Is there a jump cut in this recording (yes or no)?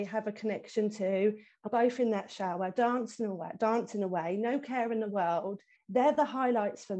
yes